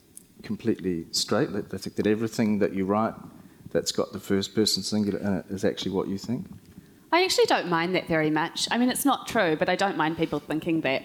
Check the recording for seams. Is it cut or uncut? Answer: uncut